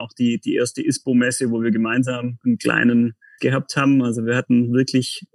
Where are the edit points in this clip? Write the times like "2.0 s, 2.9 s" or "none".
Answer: 2.4 s, 3.4 s